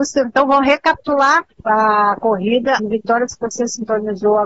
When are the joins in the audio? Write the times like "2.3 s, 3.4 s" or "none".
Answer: 1.6 s, 2.8 s